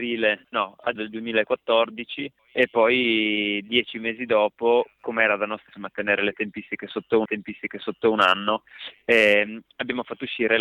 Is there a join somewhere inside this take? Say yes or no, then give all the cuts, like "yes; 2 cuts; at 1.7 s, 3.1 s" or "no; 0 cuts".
yes; 3 cuts; at 1.0 s, 5.7 s, 7.3 s